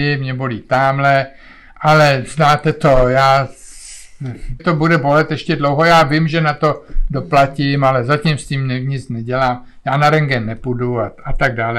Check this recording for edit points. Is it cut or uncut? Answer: cut